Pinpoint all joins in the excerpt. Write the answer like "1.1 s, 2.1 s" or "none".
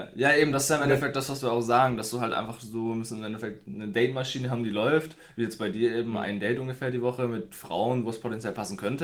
none